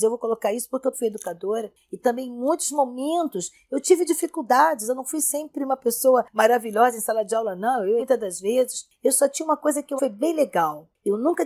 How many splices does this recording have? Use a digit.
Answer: 3